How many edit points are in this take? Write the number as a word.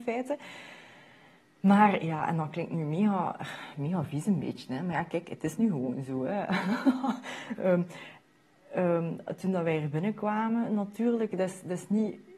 zero